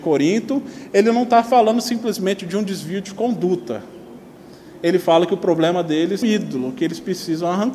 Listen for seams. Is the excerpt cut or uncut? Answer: cut